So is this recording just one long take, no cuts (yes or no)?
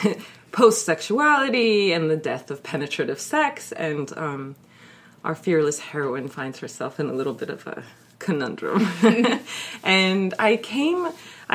yes